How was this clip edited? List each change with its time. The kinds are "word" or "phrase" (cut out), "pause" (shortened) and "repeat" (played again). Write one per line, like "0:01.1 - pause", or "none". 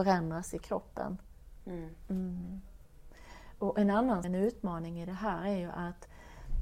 0:04.2 - phrase